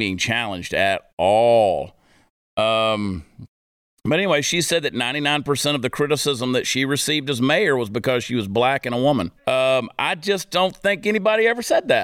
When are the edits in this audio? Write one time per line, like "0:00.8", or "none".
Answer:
0:09.4